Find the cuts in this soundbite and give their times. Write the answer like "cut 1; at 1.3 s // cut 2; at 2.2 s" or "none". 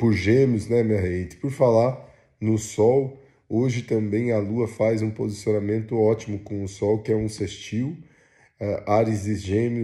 none